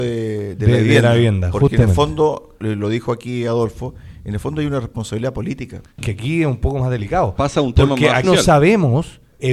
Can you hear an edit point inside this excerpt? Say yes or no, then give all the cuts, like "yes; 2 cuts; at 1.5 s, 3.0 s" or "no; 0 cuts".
yes; 3 cuts; at 2.6 s, 5.9 s, 8.2 s